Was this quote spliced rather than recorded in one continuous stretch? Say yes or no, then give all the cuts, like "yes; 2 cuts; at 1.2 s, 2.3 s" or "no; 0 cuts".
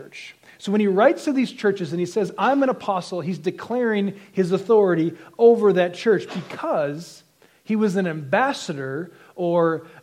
no; 0 cuts